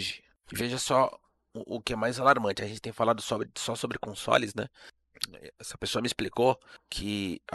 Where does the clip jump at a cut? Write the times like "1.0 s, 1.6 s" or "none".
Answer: none